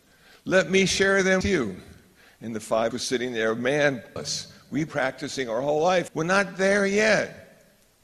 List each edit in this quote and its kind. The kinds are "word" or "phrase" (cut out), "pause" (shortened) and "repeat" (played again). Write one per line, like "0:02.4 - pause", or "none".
0:01.4 - word
0:02.9 - word
0:04.2 - word
0:04.9 - word
0:06.1 - word